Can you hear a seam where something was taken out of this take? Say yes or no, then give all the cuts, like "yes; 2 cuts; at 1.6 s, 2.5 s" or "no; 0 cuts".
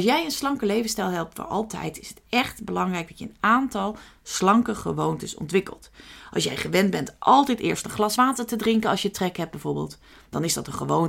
no; 0 cuts